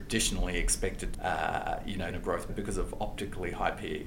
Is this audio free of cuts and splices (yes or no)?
no